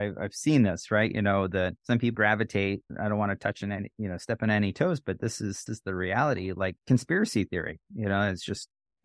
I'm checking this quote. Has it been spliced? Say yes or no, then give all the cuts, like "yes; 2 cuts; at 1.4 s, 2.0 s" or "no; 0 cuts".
yes; 4 cuts; at 1.8 s, 2.1 s, 5.7 s, 6.8 s